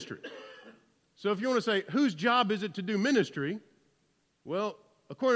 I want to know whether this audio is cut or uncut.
uncut